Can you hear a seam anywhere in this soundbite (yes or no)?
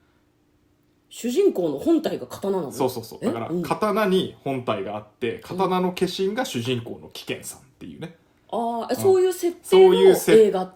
no